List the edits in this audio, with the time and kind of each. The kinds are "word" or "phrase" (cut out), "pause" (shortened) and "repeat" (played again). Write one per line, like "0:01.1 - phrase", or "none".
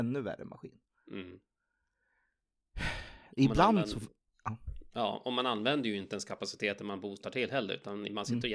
none